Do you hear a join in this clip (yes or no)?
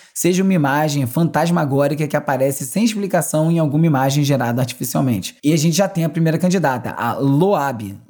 yes